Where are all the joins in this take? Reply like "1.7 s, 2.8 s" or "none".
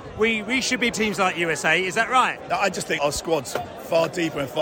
0.9 s, 3.0 s